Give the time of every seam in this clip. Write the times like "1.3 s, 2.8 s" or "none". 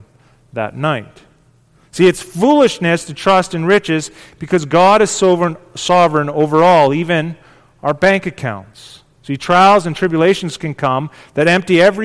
none